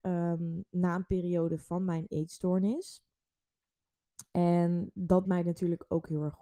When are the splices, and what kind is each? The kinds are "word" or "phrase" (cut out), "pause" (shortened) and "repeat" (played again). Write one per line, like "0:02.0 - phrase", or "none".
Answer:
0:05.2 - word